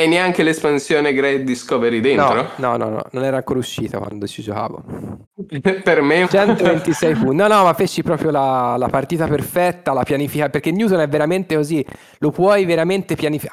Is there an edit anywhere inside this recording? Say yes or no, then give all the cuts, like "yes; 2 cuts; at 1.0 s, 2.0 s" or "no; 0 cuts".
yes; 2 cuts; at 5.2 s, 6.2 s